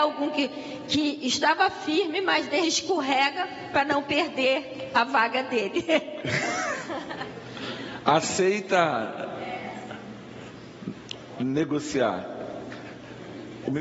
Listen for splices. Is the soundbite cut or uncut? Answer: cut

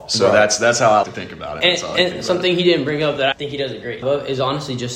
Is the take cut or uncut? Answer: cut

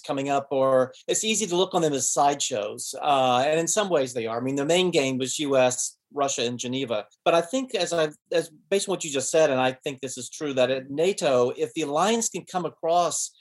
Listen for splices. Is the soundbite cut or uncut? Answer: cut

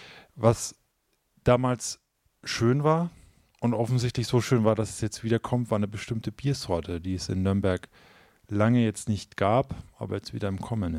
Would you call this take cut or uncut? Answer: uncut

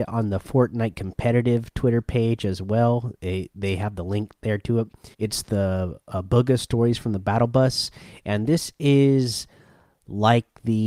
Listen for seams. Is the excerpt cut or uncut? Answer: cut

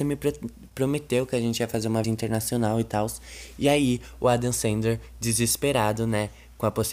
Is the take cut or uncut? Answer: cut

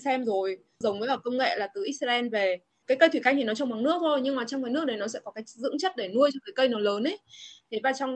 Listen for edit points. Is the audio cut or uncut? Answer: uncut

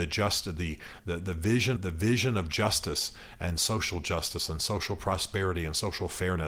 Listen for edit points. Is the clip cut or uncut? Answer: cut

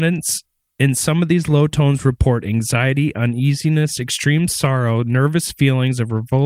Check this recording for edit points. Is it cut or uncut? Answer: uncut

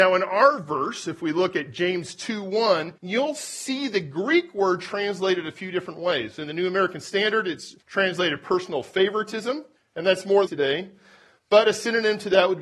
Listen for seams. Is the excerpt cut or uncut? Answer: cut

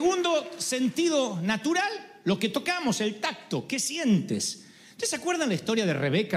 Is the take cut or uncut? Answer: uncut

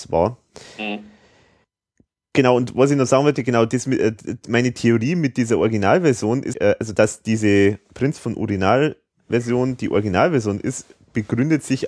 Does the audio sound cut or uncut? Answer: cut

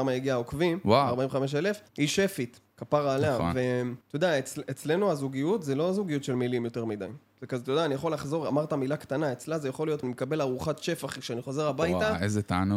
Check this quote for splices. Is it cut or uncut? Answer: cut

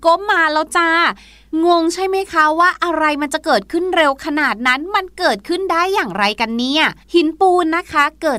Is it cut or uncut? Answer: cut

